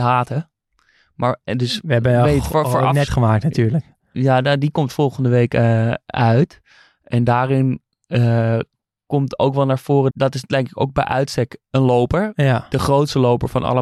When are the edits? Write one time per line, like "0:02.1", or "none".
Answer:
0:03.1
0:10.1